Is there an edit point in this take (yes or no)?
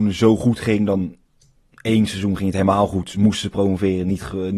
no